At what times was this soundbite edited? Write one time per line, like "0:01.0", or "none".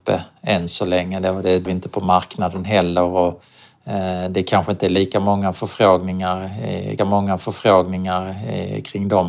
0:01.7
0:07.0